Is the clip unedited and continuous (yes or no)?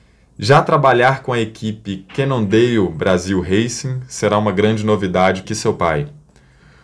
no